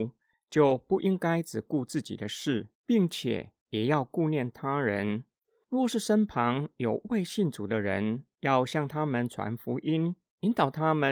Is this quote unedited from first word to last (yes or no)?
no